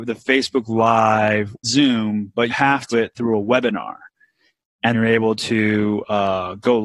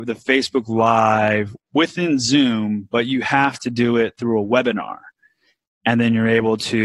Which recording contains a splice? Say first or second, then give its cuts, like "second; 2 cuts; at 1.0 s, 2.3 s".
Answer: first; 4 cuts; at 1.6 s, 2.5 s, 2.9 s, 4.9 s